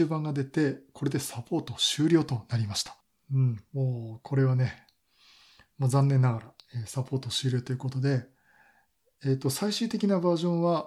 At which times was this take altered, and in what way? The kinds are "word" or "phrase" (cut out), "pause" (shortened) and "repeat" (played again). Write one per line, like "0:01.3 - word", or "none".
none